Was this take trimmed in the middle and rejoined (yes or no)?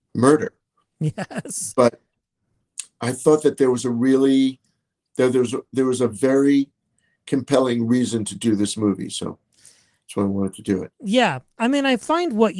no